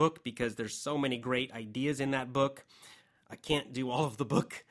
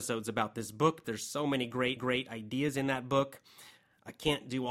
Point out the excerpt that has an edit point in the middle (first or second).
second